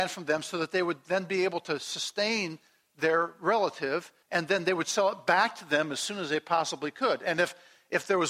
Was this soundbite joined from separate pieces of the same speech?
yes; 1 cut; at 4.2 s

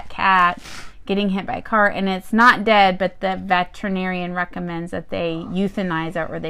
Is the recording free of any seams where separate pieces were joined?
yes; 0 cuts

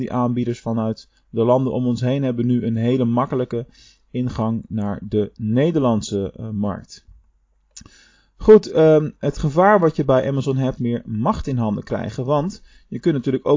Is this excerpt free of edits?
no; 1 cut; at 10.8 s

